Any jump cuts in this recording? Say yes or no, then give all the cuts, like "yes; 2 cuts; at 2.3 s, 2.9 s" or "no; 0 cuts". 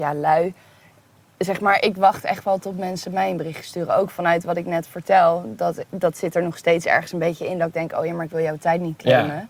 no; 0 cuts